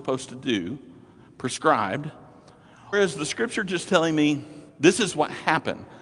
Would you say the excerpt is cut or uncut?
cut